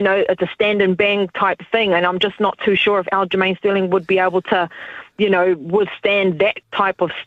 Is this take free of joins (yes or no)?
yes